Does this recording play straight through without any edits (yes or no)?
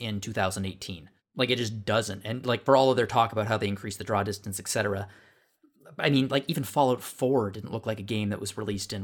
yes